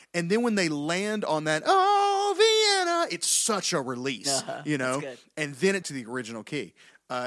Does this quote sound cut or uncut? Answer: cut